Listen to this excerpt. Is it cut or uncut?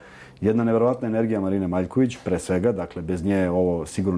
uncut